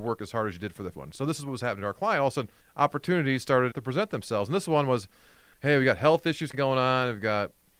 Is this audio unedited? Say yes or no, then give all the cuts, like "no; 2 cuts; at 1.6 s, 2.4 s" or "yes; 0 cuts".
no; 5 cuts; at 0.9 s, 2.6 s, 3.7 s, 5.5 s, 6.5 s